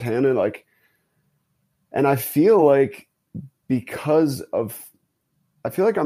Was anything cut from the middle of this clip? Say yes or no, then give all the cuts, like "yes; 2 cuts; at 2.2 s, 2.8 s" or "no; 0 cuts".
no; 0 cuts